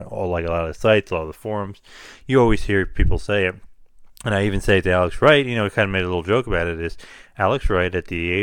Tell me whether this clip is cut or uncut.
uncut